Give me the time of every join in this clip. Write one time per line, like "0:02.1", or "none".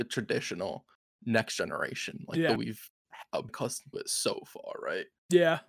0:02.6
0:03.5
0:03.9